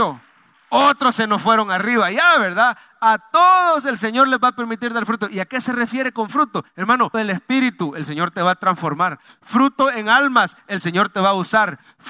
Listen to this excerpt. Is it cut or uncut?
cut